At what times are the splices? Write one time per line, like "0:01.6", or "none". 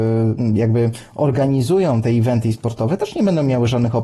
0:02.0